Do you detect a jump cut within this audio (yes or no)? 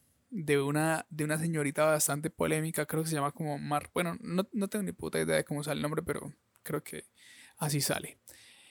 no